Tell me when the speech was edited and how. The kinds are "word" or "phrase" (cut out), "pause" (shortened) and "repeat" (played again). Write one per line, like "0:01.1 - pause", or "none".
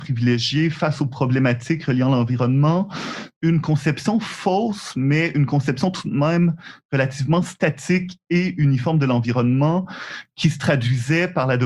none